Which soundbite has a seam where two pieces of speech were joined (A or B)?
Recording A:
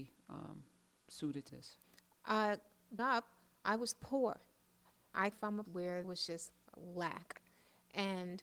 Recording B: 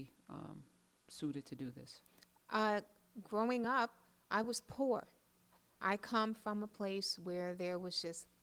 A